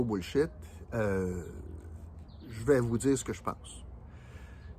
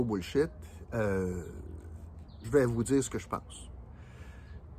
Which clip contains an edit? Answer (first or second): second